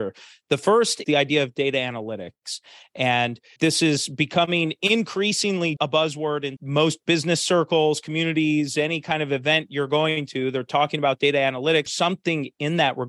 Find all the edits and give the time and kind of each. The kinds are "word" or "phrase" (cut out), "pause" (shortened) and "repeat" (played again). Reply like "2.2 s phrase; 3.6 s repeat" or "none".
1.0 s word; 3.6 s word; 5.8 s word; 6.6 s word; 11.9 s word